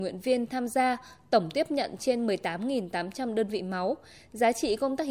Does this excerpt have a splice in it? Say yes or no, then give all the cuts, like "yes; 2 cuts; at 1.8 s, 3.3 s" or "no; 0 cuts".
no; 0 cuts